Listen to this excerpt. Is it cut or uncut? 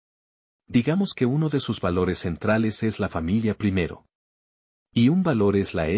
uncut